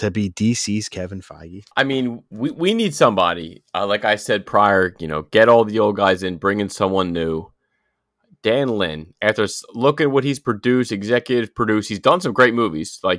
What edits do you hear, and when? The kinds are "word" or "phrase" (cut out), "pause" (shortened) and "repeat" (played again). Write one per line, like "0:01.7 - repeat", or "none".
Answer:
0:01.7 - pause